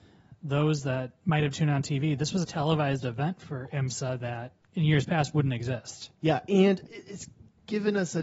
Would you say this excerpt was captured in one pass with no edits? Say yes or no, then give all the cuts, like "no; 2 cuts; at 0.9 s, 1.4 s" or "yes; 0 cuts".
no; 4 cuts; at 2.4 s, 4.6 s, 6.2 s, 6.9 s